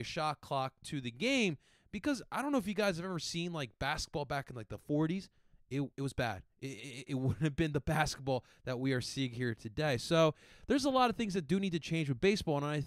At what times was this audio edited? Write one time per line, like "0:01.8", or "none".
none